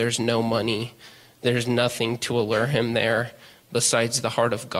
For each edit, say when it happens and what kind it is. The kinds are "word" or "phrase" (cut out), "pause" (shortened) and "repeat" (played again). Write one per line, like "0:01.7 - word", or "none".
none

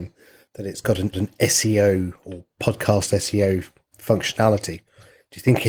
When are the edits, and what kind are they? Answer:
0:01.1 - repeat
0:02.5 - pause

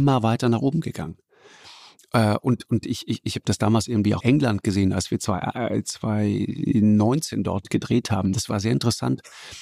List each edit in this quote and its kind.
0:04.2 - phrase

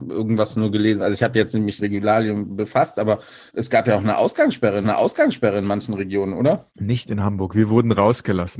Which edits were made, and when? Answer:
0:01.8 - phrase
0:02.5 - word
0:03.5 - pause
0:04.8 - repeat
0:06.7 - pause

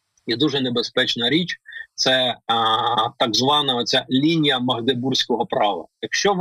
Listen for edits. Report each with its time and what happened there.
none

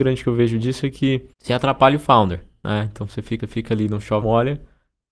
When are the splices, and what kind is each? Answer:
0:01.3 - pause
0:03.4 - repeat
0:04.2 - word

